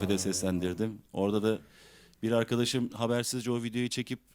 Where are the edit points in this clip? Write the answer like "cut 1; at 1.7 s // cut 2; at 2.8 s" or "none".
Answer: none